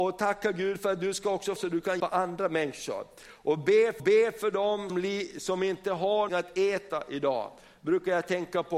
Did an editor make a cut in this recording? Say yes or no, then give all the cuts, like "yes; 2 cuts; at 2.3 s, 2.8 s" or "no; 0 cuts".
yes; 5 cuts; at 1.6 s, 2.0 s, 4.0 s, 4.9 s, 6.3 s